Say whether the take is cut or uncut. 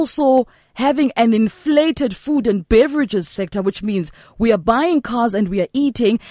uncut